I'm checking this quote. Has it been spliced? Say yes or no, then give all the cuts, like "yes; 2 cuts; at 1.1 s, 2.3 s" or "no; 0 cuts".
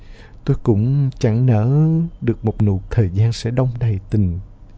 yes; 1 cut; at 2.9 s